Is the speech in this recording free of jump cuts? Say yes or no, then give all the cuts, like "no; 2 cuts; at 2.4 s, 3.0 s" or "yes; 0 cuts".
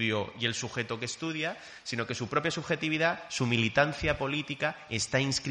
yes; 0 cuts